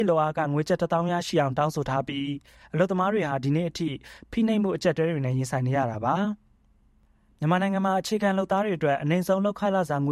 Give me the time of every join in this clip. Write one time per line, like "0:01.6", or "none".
none